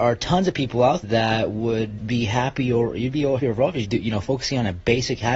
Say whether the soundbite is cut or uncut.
cut